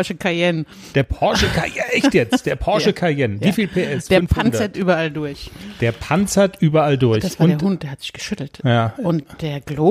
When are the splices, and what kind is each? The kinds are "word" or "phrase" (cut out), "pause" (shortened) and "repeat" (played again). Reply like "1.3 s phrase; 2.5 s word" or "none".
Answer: none